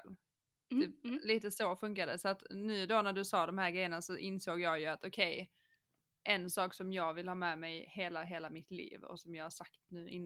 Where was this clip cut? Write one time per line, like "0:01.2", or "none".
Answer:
none